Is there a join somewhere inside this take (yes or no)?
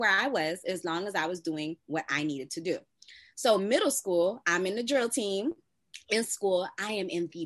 no